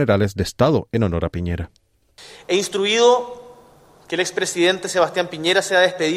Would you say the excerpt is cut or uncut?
uncut